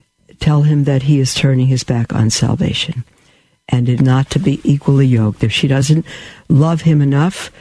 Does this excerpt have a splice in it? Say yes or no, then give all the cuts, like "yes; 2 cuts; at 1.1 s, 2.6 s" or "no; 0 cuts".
yes; 1 cut; at 4.0 s